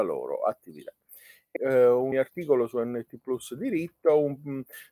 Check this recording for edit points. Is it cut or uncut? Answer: cut